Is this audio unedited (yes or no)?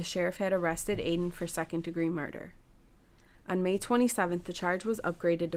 yes